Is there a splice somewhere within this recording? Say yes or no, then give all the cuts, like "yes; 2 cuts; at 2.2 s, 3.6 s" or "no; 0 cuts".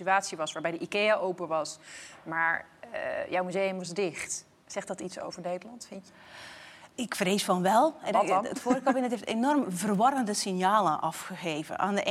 yes; 1 cut; at 6.9 s